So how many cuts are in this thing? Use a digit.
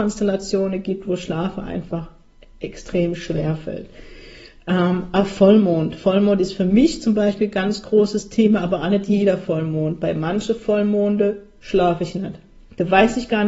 0